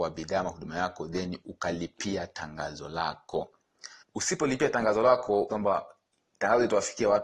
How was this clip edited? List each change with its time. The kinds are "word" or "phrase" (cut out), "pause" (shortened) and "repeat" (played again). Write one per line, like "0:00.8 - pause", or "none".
0:04.0 - pause
0:05.5 - phrase